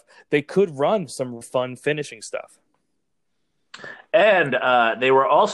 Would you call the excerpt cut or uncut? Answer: cut